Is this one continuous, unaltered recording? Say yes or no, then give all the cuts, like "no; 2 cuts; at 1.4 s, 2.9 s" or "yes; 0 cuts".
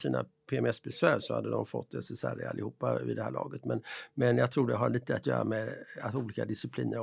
yes; 0 cuts